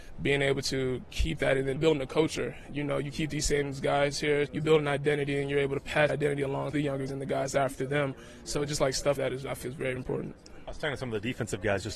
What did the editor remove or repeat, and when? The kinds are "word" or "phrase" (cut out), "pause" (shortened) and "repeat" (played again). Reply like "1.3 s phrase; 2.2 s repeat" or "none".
1.8 s word; 4.5 s word; 6.1 s word; 6.7 s word; 7.1 s word; 9.2 s word; 9.6 s word; 10.0 s word